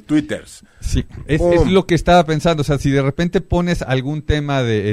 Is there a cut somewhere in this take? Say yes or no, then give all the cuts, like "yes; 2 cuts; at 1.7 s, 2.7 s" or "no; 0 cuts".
no; 0 cuts